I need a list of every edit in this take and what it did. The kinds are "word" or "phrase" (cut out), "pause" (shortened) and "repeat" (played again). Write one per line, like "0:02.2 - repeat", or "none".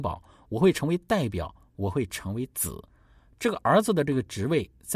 0:02.9 - pause